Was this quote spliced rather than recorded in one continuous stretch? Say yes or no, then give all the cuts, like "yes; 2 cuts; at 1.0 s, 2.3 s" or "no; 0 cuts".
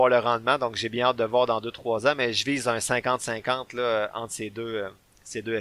no; 0 cuts